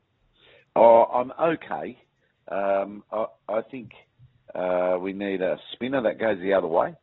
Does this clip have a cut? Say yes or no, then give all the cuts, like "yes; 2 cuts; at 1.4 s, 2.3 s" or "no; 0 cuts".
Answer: no; 0 cuts